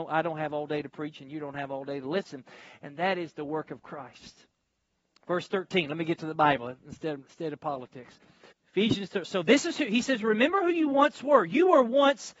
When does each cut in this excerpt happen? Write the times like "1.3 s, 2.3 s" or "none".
8.5 s